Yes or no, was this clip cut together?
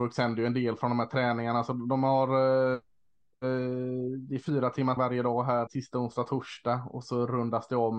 yes